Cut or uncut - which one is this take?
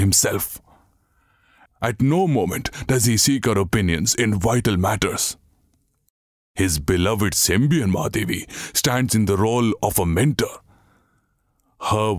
uncut